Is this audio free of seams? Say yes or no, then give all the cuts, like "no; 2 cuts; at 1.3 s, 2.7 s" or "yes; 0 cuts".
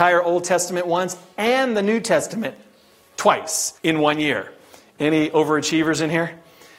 no; 1 cut; at 3.8 s